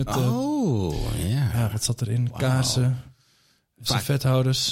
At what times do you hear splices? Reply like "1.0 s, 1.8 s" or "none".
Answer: none